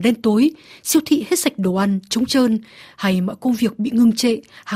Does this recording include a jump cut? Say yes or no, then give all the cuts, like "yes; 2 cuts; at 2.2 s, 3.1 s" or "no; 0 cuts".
no; 0 cuts